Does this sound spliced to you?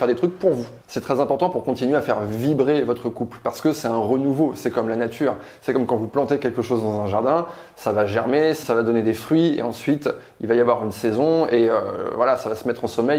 yes; 1 cut; at 8.6 s

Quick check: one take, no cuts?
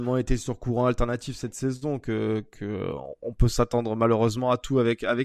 yes; 0 cuts

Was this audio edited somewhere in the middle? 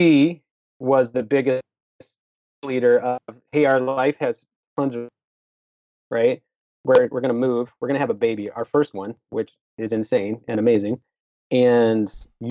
no; 0 cuts

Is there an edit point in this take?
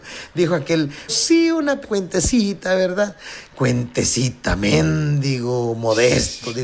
yes; 2 cuts; at 1.1 s, 1.8 s

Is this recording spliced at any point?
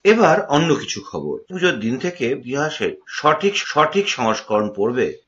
yes; 3 cuts; at 1.5 s, 2.4 s, 3.6 s

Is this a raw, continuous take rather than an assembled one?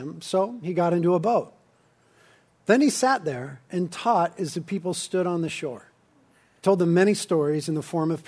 yes; 0 cuts

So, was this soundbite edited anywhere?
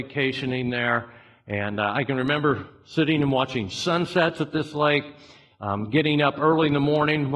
no; 0 cuts

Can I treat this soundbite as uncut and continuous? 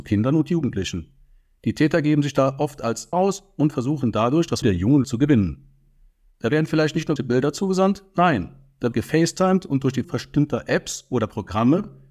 no; 6 cuts; at 3.1 s, 4.6 s, 5.0 s, 7.2 s, 8.9 s, 10.0 s

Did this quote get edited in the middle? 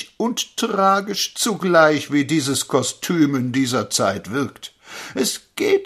no; 0 cuts

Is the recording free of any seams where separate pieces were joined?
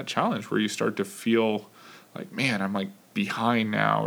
yes; 0 cuts

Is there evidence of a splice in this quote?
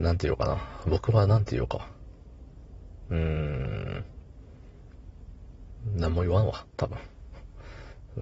no; 0 cuts

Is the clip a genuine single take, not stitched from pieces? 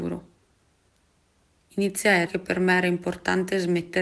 no; 1 cut; at 2.3 s

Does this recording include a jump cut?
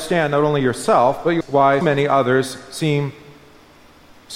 yes; 2 cuts; at 1.4 s, 1.8 s

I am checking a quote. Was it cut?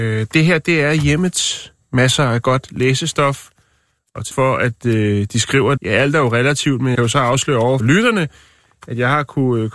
yes; 4 cuts; at 4.3 s, 5.8 s, 6.9 s, 7.8 s

